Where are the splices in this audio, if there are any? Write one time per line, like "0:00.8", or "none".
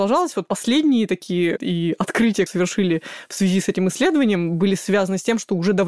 0:01.6
0:02.5